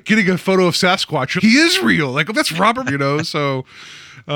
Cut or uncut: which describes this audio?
cut